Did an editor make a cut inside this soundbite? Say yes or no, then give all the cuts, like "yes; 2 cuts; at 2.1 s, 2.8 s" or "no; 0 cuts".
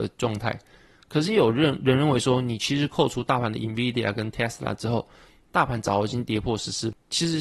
no; 0 cuts